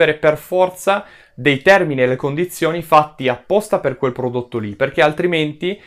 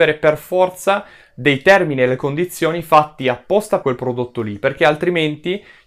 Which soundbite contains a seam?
second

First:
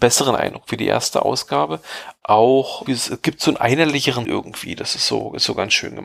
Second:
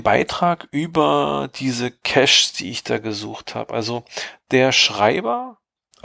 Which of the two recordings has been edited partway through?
first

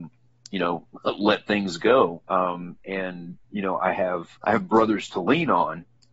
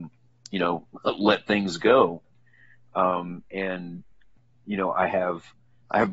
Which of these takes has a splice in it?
first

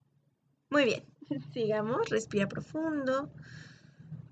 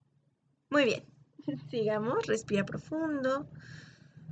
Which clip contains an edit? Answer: first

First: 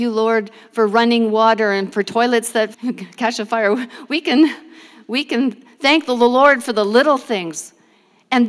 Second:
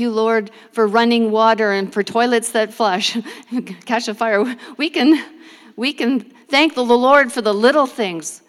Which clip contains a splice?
first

